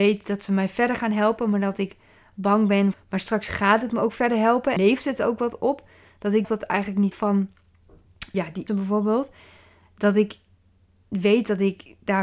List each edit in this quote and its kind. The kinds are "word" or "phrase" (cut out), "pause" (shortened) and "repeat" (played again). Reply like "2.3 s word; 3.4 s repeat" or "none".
2.9 s word; 4.8 s word; 6.4 s word; 7.1 s word; 8.3 s word; 8.7 s word